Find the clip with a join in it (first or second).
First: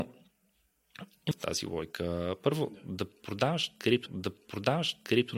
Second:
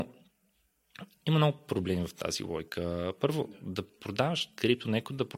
first